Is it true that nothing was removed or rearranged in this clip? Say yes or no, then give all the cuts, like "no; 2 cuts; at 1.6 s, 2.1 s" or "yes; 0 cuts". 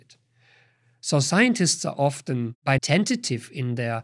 no; 1 cut; at 2.8 s